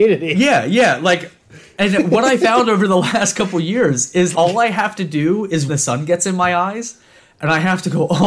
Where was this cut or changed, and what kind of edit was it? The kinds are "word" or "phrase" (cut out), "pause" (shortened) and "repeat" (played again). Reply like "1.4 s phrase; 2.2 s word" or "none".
4.3 s word; 5.7 s phrase